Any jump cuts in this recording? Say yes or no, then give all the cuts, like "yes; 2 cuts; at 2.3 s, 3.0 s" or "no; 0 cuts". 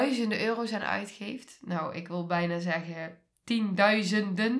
no; 0 cuts